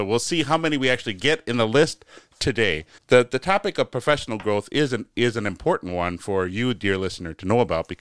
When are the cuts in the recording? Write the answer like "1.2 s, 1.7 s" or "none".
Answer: 3.0 s